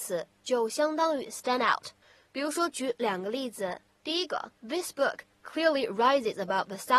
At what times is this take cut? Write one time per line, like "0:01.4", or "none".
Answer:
0:02.0
0:03.9
0:04.6